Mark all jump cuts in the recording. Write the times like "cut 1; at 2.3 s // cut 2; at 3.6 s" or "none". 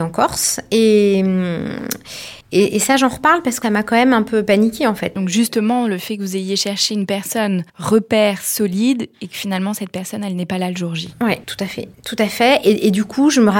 cut 1; at 2.4 s // cut 2; at 3.6 s // cut 3; at 7.7 s // cut 4; at 11.4 s // cut 5; at 11.9 s

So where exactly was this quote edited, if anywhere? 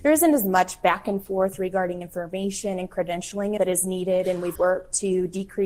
cut 1; at 2.0 s // cut 2; at 3.6 s // cut 3; at 4.5 s

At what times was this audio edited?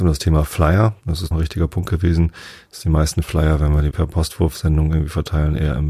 cut 1; at 1.3 s // cut 2; at 3.9 s

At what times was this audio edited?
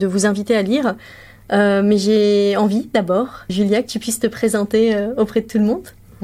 cut 1; at 3.5 s

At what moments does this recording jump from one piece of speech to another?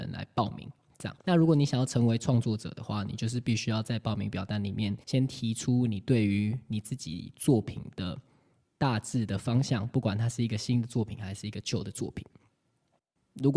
cut 1; at 1.2 s // cut 2; at 5.0 s

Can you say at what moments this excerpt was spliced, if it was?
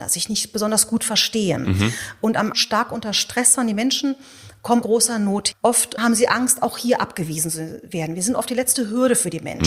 cut 1; at 2.5 s // cut 2; at 4.8 s // cut 3; at 5.5 s // cut 4; at 6.0 s

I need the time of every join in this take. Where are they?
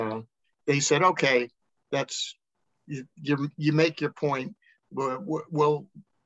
none

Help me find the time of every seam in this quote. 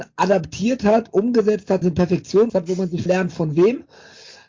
cut 1; at 1.8 s // cut 2; at 2.5 s // cut 3; at 3.1 s

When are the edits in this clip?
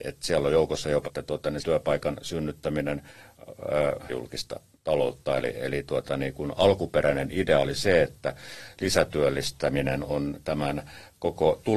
cut 1; at 1.0 s // cut 2; at 1.6 s // cut 3; at 4.1 s // cut 4; at 5.5 s

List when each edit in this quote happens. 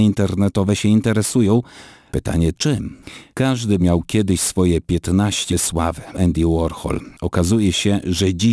cut 1; at 2.5 s // cut 2; at 3.8 s // cut 3; at 5.5 s // cut 4; at 6.1 s

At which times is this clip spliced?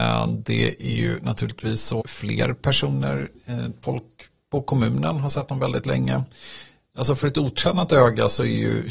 cut 1; at 2.0 s // cut 2; at 3.8 s

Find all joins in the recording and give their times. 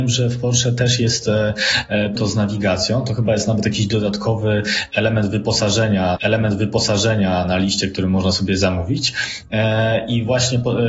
cut 1; at 2.2 s // cut 2; at 6.2 s

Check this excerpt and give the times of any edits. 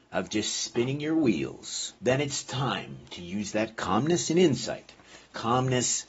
cut 1; at 2.0 s

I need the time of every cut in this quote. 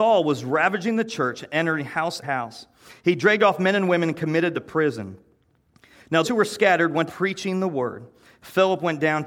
cut 1; at 2.2 s // cut 2; at 4.5 s // cut 3; at 6.2 s // cut 4; at 7.1 s

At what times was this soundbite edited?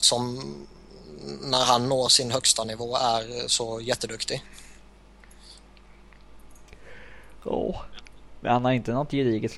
none

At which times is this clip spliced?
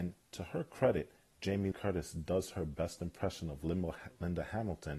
cut 1; at 1.7 s

